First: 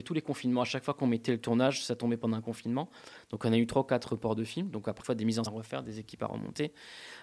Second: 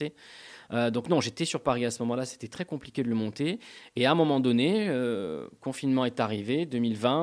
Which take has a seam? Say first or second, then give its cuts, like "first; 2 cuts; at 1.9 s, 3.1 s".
first; 2 cuts; at 5.0 s, 5.5 s